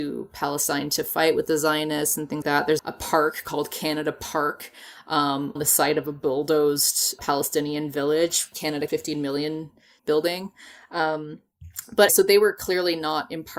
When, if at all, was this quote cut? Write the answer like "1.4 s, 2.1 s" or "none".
2.4 s, 2.8 s, 5.6 s, 7.2 s, 8.5 s, 8.9 s, 10.0 s, 12.1 s